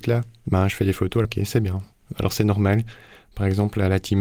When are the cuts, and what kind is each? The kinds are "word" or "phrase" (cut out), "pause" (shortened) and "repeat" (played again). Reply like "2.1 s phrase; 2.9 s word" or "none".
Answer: 1.2 s phrase